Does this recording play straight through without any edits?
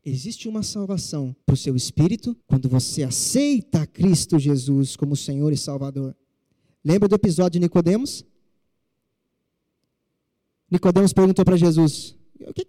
no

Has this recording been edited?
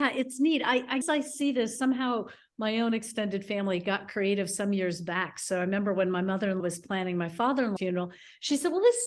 yes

